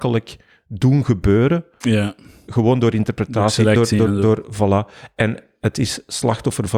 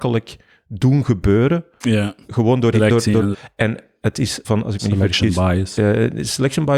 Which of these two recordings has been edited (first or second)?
second